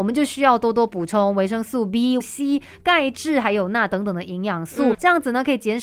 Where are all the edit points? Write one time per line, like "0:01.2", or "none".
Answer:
0:02.2
0:04.9